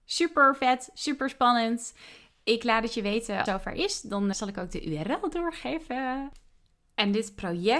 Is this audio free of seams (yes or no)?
no